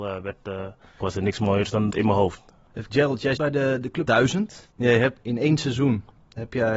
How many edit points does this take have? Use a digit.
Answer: 6